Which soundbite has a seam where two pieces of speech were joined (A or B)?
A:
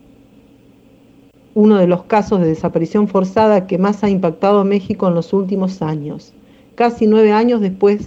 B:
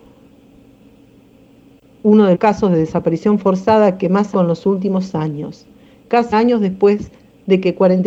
B